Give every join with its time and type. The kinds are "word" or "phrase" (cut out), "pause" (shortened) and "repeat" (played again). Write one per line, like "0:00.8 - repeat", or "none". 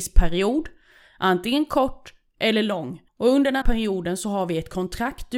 0:03.1 - pause
0:03.6 - word